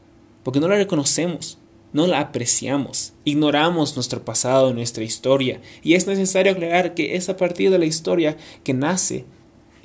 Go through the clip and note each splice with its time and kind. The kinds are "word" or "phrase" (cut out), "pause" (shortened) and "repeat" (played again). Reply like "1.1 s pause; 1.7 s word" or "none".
none